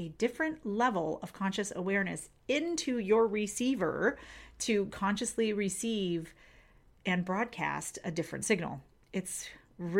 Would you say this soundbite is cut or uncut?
uncut